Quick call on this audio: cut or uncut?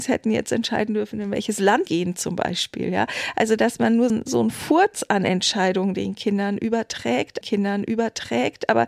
cut